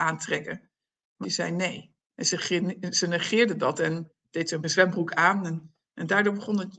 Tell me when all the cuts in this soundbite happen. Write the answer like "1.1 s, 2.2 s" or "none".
1.2 s, 2.0 s, 4.6 s